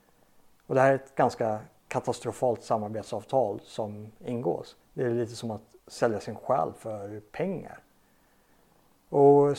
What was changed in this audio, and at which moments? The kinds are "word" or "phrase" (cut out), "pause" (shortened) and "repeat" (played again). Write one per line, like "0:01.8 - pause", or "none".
0:04.8 - pause
0:05.8 - pause